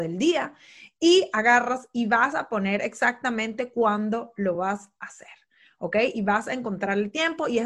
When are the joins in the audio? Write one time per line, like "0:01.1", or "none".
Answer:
none